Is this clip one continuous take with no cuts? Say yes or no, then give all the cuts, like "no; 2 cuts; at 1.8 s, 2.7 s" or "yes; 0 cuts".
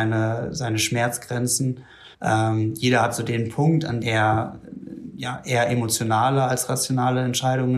no; 2 cuts; at 2.1 s, 4.0 s